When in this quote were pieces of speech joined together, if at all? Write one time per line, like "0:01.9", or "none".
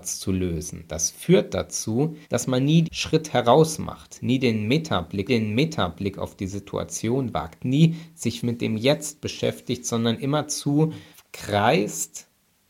0:02.2
0:02.8
0:05.3
0:08.4
0:11.1